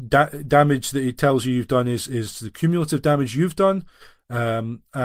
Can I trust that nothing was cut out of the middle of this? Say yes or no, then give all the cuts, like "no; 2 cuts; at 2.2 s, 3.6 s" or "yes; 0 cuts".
yes; 0 cuts